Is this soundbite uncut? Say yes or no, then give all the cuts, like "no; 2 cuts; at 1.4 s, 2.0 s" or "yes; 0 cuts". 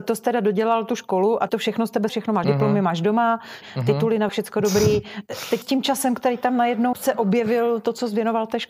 no; 7 cuts; at 1.5 s, 2.1 s, 2.4 s, 3.6 s, 4.3 s, 5.6 s, 6.9 s